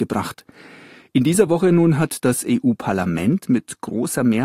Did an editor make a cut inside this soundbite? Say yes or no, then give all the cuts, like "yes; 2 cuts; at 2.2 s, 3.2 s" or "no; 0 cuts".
no; 0 cuts